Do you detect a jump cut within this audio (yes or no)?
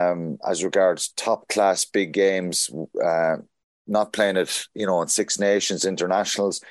no